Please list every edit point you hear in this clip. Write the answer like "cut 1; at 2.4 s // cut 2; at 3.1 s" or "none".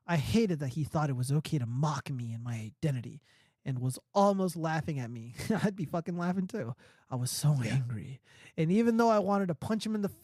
none